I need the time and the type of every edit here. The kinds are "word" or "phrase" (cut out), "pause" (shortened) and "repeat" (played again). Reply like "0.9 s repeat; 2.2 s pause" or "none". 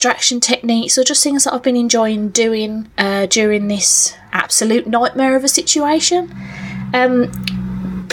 4.3 s pause